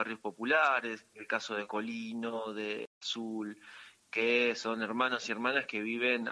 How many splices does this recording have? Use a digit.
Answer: 1